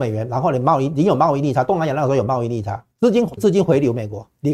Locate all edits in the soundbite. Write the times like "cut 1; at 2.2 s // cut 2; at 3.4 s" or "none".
cut 1; at 2.9 s // cut 2; at 3.4 s